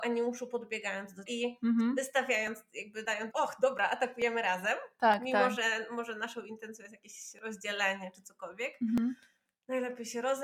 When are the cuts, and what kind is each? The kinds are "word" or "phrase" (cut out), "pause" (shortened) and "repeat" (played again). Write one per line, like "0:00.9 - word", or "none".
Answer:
0:01.3 - word
0:03.3 - word